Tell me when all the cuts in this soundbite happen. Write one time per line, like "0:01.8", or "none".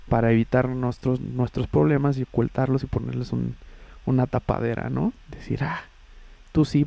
0:05.2